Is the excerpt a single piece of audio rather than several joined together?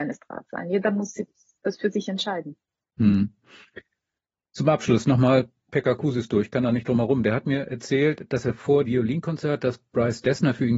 no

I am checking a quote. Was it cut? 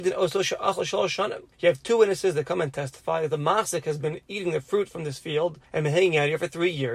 yes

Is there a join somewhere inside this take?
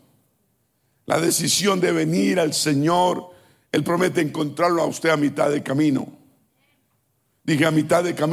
no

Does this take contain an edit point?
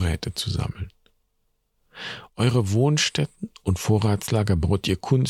no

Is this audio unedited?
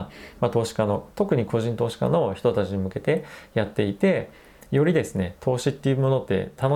yes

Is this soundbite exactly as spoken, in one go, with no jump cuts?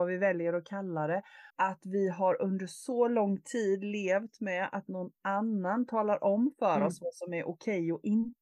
no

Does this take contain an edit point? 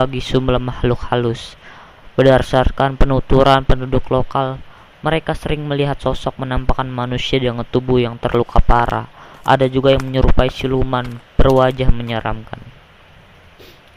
no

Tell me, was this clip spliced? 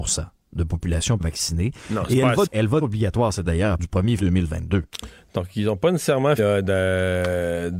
yes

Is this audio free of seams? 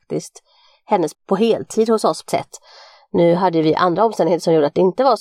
no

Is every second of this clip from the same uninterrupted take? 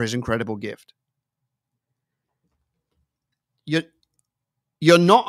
yes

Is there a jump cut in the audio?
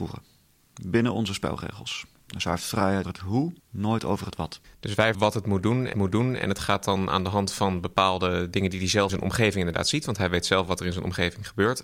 yes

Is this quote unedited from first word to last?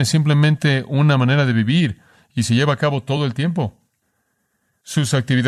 yes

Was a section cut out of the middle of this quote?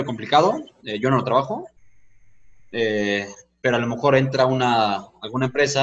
no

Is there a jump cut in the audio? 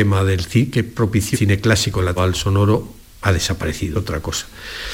yes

